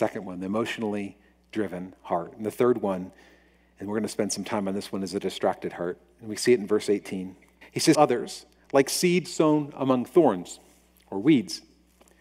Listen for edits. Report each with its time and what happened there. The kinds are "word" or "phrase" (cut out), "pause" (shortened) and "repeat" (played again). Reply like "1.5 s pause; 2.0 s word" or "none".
7.6 s pause; 7.9 s word